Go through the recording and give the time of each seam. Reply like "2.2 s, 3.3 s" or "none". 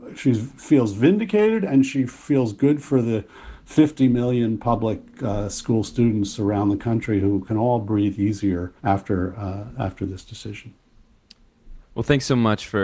8.8 s